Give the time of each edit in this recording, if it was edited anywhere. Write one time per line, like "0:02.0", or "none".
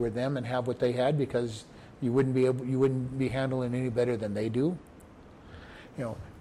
none